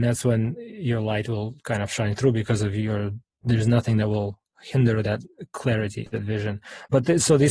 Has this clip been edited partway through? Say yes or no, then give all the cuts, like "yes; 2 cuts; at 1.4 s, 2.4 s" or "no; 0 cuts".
yes; 1 cut; at 6.1 s